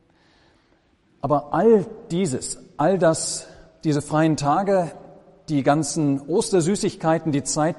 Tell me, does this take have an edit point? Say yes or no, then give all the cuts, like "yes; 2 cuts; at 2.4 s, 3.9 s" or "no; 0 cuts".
no; 0 cuts